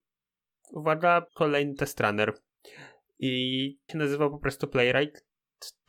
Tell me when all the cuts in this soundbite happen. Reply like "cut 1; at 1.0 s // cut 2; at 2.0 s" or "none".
cut 1; at 1.3 s // cut 2; at 3.9 s